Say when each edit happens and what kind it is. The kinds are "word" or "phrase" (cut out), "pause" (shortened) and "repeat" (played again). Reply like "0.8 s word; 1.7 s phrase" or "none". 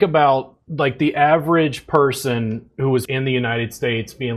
3.1 s word